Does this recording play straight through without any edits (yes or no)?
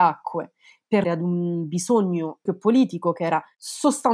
no